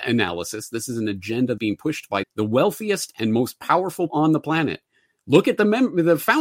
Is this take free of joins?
no; 3 cuts; at 1.6 s, 2.2 s, 4.1 s

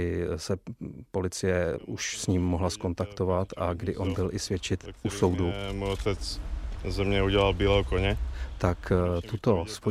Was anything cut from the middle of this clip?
no; 0 cuts

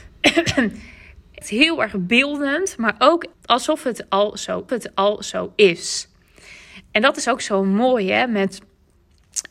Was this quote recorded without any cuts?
no; 3 cuts; at 1.4 s, 3.3 s, 4.7 s

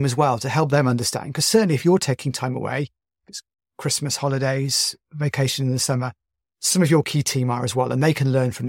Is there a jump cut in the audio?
no; 0 cuts

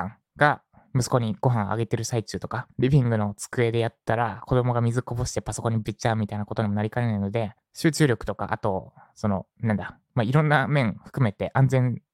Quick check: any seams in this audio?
yes; 3 cuts; at 2.7 s, 7.6 s, 9.5 s

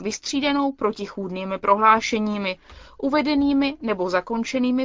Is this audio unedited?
yes; 0 cuts

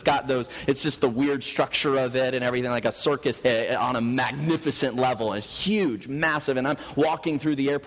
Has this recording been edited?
yes; 2 cuts; at 3.4 s, 5.4 s

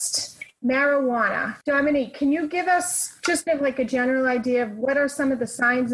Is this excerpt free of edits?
no; 2 cuts; at 1.6 s, 3.5 s

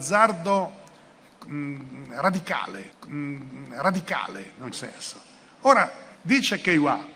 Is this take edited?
yes; 3 cuts; at 2.9 s, 4.7 s, 6.2 s

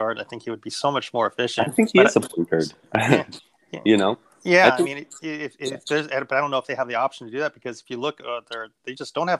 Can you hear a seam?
no; 0 cuts

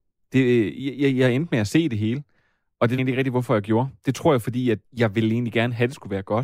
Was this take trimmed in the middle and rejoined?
yes; 2 cuts; at 3.0 s, 4.8 s

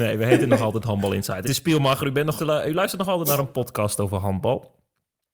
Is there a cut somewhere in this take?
yes; 2 cuts; at 1.4 s, 2.4 s

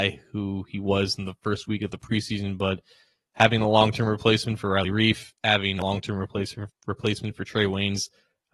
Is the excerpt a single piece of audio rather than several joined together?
no; 1 cut; at 6.7 s

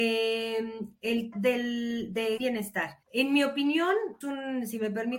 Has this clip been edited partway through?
yes; 4 cuts; at 1.3 s, 2.4 s, 3.0 s, 4.2 s

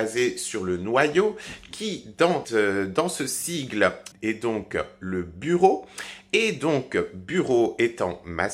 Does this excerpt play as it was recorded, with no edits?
no; 2 cuts; at 2.4 s, 4.1 s

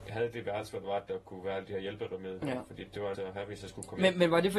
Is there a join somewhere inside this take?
yes; 1 cut; at 3.1 s

